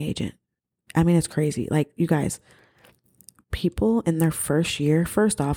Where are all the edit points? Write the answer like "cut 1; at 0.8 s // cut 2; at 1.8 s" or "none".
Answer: none